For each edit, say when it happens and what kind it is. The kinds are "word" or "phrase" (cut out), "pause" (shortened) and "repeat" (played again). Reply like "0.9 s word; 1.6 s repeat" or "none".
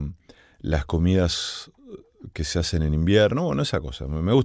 none